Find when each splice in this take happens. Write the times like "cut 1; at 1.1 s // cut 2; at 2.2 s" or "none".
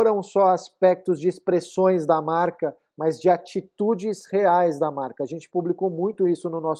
none